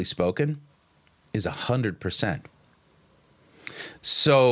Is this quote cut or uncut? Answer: uncut